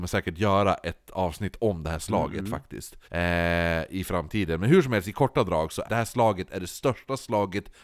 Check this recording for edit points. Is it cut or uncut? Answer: cut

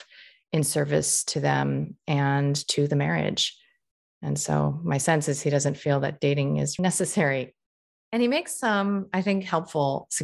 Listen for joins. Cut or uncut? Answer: cut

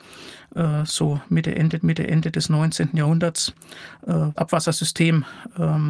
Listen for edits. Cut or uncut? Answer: cut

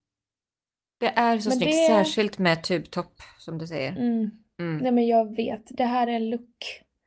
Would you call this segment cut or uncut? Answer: uncut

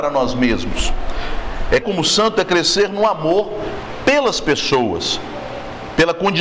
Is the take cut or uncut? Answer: cut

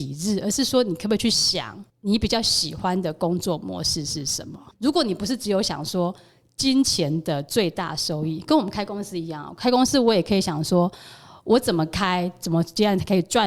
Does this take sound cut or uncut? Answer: cut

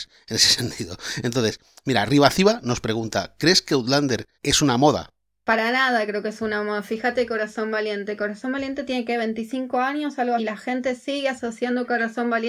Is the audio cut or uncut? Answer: cut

